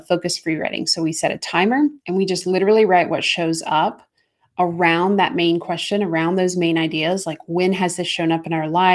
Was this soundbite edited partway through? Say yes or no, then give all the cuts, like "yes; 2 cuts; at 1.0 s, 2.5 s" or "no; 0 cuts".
yes; 1 cut; at 2.0 s